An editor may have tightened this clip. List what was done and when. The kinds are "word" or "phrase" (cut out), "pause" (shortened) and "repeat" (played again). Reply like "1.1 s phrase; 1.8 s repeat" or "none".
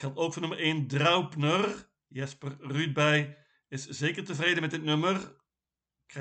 2.0 s pause